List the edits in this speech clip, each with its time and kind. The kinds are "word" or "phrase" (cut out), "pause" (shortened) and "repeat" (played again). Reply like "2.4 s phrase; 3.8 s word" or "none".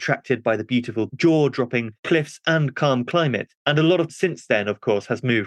1.1 s word; 4.1 s word